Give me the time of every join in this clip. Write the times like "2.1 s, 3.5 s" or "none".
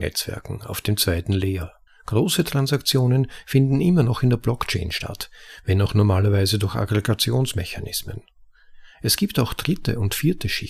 1.9 s